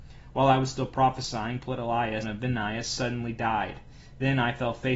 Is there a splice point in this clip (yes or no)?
yes